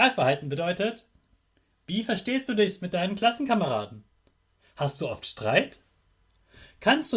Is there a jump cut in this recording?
no; 0 cuts

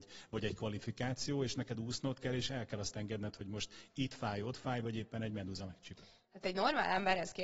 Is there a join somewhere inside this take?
no; 0 cuts

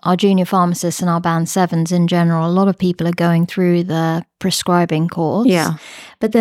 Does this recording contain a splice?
no; 0 cuts

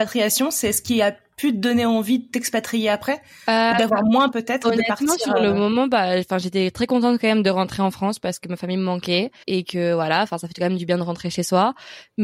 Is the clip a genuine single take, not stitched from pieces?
no; 2 cuts; at 4.3 s, 9.4 s

